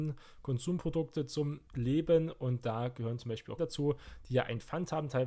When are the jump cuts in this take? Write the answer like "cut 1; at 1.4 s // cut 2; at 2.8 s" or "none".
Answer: cut 1; at 1.7 s // cut 2; at 3.6 s